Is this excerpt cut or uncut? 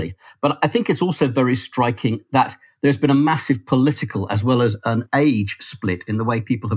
uncut